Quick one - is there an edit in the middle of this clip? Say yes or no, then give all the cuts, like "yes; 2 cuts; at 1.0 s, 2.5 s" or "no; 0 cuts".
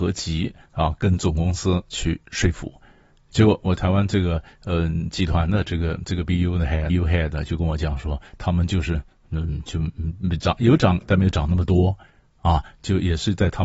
yes; 1 cut; at 6.9 s